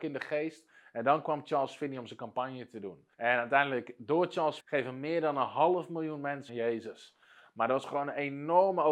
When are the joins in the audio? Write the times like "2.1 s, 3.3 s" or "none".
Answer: 3.1 s, 4.6 s, 6.5 s